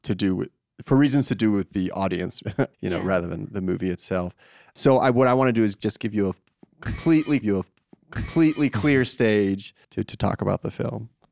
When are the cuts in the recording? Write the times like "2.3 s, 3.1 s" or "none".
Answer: 2.7 s, 7.4 s, 9.8 s